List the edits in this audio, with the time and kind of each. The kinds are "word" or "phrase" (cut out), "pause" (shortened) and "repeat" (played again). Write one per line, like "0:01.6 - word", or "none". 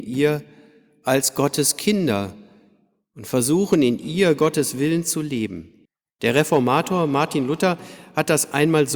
0:05.9 - pause